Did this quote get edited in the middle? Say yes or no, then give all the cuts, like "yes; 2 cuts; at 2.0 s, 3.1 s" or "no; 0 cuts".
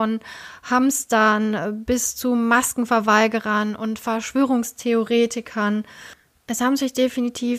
no; 0 cuts